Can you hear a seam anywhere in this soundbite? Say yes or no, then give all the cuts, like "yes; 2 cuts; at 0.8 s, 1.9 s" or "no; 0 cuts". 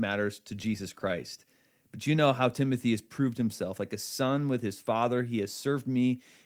no; 0 cuts